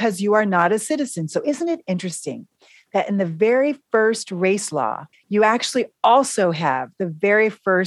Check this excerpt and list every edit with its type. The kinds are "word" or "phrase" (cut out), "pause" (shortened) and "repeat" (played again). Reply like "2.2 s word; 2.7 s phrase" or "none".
5.1 s pause